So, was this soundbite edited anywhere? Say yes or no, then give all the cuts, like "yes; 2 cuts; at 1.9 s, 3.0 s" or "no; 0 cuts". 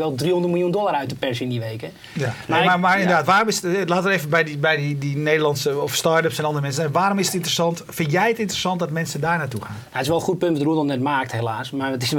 no; 0 cuts